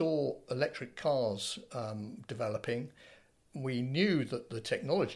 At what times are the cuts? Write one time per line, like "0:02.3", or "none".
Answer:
none